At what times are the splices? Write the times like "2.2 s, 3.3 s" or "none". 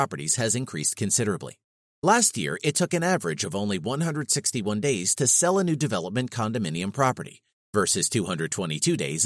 none